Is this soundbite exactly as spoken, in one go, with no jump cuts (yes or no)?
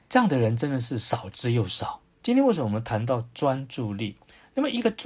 no